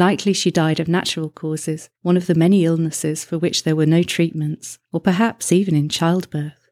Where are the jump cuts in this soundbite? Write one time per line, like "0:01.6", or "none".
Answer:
0:02.0
0:04.8